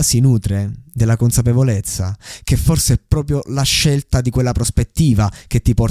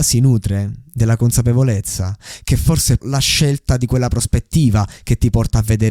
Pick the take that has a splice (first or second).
second